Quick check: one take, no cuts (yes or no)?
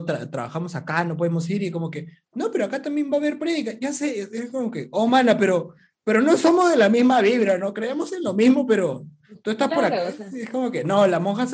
yes